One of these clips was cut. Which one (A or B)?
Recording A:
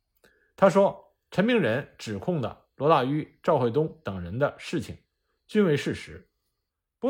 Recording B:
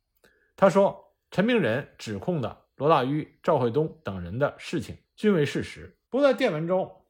B